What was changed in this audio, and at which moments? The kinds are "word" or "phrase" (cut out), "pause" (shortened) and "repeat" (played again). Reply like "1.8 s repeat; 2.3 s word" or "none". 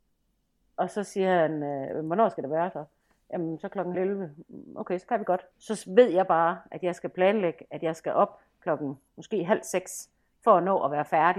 3.9 s word; 5.5 s pause; 9.1 s pause

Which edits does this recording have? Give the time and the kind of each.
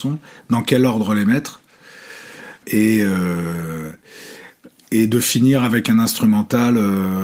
2.6 s word

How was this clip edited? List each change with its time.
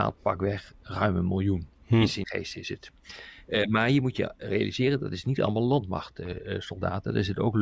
2.2 s word

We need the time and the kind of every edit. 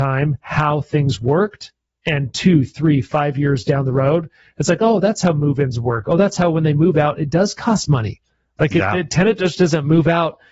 none

